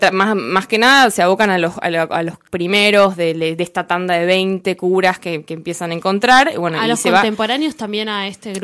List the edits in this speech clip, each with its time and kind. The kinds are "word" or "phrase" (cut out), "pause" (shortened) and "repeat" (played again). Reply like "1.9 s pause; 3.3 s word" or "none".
2.5 s phrase